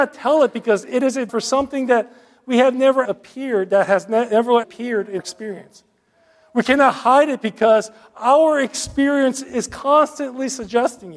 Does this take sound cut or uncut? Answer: cut